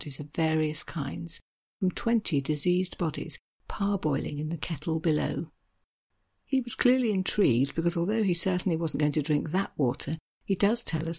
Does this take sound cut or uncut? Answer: uncut